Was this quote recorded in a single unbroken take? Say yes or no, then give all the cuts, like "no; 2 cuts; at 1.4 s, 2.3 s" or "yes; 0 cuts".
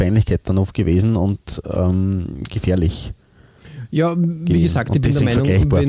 yes; 0 cuts